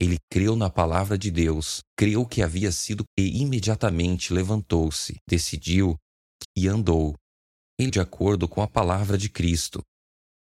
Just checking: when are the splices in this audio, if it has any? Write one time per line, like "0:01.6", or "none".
0:01.9
0:03.1
0:05.2
0:06.4
0:07.9